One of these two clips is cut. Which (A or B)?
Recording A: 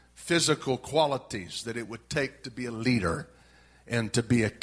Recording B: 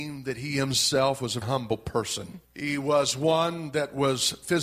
B